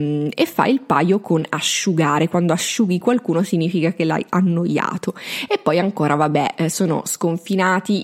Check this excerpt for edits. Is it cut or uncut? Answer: uncut